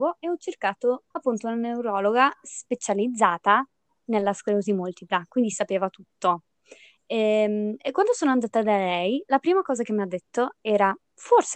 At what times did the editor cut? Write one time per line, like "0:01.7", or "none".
0:01.1

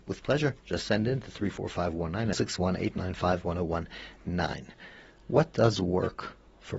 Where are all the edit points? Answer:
0:02.3

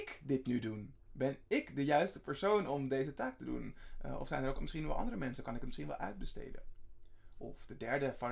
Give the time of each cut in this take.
none

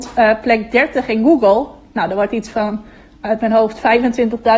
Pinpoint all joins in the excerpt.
none

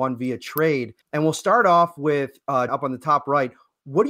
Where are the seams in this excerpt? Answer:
0:01.0
0:02.7

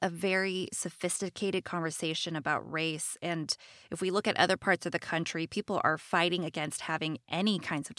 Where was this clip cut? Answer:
none

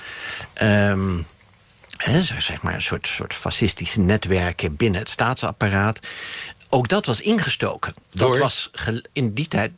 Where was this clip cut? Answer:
0:08.0

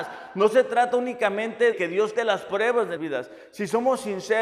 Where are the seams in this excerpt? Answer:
0:01.7
0:02.1
0:03.0

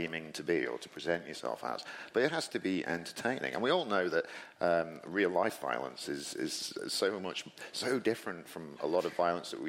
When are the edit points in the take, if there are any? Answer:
none

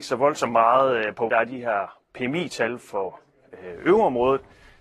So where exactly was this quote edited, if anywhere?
0:01.3

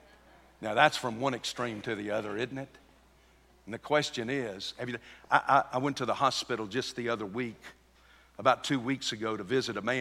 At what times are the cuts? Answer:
none

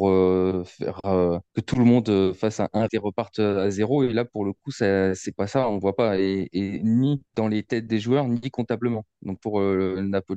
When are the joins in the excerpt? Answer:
0:01.5
0:02.9
0:07.3
0:09.4

